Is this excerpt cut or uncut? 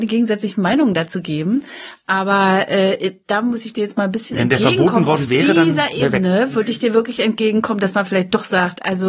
uncut